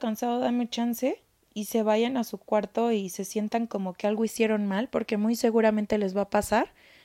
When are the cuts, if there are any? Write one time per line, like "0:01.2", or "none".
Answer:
0:01.3